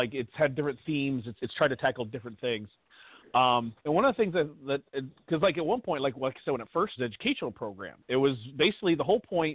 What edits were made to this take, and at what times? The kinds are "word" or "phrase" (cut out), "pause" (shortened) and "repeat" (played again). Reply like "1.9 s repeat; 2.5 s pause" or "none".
1.4 s word; 3.8 s pause; 7.0 s phrase